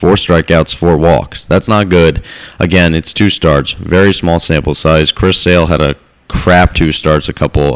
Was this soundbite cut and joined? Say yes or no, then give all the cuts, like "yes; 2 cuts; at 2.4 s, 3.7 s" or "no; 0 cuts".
no; 0 cuts